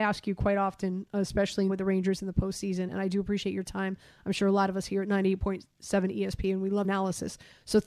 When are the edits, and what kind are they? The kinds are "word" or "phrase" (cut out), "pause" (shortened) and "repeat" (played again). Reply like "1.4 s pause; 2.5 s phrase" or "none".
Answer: 1.7 s word; 2.9 s word; 6.8 s word